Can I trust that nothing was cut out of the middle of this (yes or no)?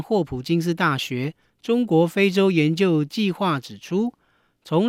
yes